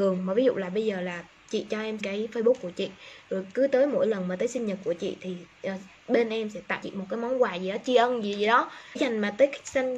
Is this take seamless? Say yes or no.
no